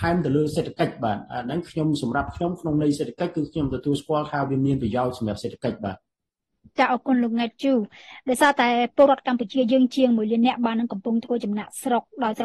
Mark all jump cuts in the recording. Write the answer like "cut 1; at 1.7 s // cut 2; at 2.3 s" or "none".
none